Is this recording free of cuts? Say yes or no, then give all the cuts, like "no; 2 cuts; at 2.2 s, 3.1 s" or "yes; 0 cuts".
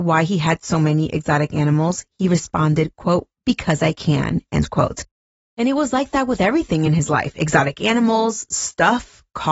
yes; 0 cuts